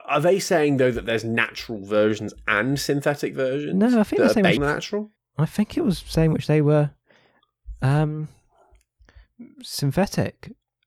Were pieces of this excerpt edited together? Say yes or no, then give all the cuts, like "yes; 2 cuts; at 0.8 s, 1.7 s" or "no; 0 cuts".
yes; 2 cuts; at 4.6 s, 5.2 s